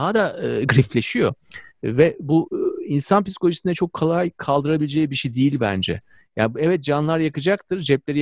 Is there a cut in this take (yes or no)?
no